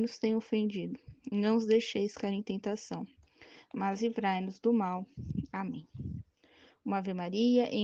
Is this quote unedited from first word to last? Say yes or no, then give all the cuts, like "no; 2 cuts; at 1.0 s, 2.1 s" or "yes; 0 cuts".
yes; 0 cuts